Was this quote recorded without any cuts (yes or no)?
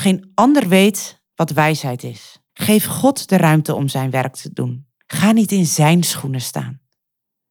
no